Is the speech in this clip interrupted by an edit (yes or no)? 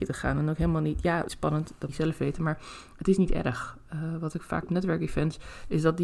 yes